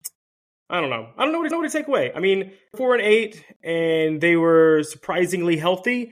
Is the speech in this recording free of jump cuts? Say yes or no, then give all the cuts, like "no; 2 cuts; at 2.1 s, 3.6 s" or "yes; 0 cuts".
no; 2 cuts; at 1.5 s, 2.7 s